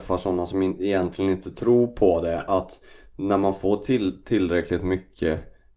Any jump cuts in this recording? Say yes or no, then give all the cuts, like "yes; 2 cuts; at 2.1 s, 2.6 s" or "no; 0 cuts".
no; 0 cuts